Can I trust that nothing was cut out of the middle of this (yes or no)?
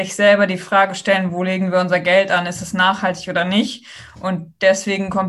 yes